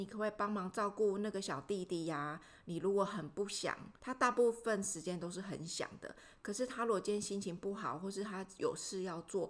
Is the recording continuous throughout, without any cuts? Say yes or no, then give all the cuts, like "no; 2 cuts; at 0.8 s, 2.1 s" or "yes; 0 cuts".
no; 1 cut; at 4.0 s